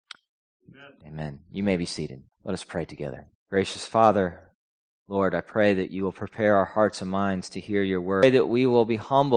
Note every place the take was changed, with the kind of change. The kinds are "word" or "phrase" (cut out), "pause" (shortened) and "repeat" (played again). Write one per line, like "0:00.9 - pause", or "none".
0:02.3 - pause
0:03.4 - pause
0:04.8 - pause